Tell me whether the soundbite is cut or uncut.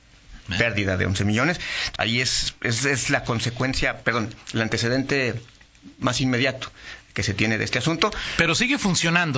cut